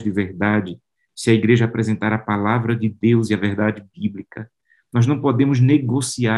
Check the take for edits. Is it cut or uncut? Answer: uncut